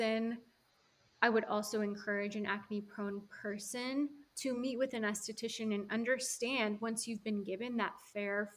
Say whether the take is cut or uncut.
uncut